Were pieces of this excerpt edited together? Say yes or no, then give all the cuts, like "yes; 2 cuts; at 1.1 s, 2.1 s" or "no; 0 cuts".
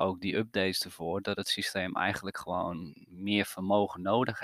no; 0 cuts